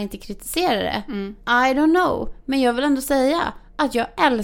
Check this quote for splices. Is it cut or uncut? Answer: cut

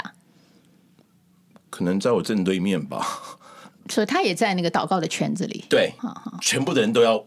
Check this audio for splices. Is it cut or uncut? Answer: cut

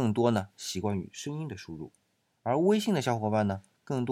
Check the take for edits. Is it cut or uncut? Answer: uncut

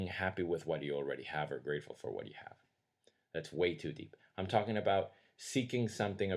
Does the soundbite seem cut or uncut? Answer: uncut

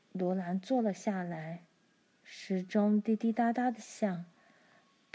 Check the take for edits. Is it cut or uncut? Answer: cut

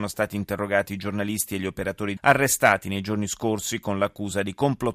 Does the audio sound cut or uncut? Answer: cut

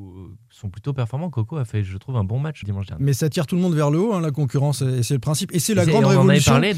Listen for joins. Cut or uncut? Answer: cut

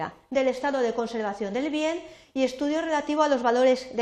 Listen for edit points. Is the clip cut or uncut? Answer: uncut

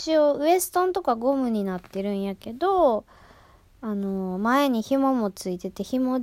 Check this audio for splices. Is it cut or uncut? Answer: uncut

